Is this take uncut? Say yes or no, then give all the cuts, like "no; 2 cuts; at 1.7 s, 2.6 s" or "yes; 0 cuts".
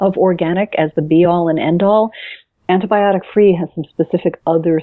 yes; 0 cuts